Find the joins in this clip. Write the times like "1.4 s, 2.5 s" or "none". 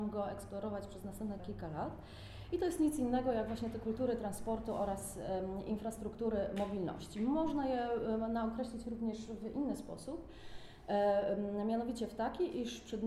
1.4 s